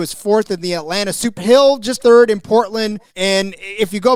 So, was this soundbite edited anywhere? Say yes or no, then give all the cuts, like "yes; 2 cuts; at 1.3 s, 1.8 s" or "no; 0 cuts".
yes; 3 cuts; at 1.4 s, 2.0 s, 3.1 s